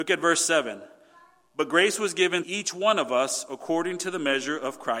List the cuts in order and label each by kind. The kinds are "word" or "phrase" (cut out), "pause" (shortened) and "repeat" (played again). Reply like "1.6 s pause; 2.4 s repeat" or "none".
2.4 s word